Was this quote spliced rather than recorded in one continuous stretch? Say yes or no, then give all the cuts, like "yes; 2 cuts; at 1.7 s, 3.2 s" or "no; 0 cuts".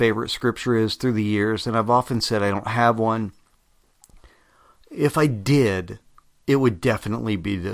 no; 0 cuts